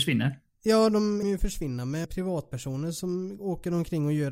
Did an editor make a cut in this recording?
yes; 2 cuts; at 1.2 s, 2.0 s

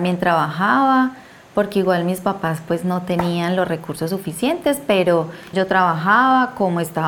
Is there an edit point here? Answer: yes; 1 cut; at 5.5 s

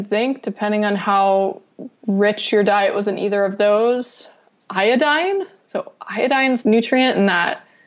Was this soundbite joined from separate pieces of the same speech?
yes; 3 cuts; at 2.0 s, 4.5 s, 6.6 s

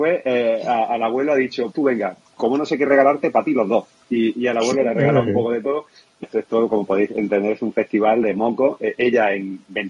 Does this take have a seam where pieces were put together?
yes; 3 cuts; at 1.7 s, 6.2 s, 8.2 s

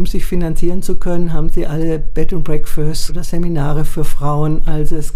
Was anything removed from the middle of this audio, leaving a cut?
yes; 1 cut; at 3.1 s

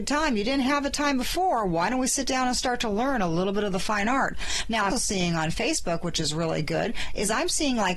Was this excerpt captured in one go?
no; 1 cut; at 4.9 s

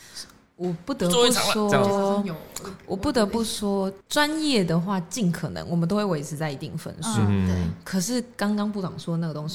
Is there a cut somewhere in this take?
yes; 1 cut; at 4.0 s

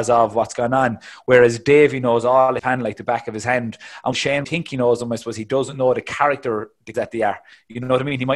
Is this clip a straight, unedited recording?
no; 4 cuts; at 2.6 s, 4.1 s, 4.4 s, 6.9 s

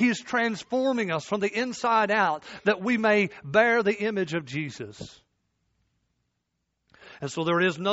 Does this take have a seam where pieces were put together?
no; 0 cuts

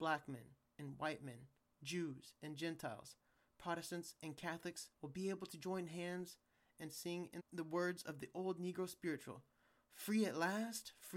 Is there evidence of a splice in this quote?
yes; 2 cuts; at 4.9 s, 7.4 s

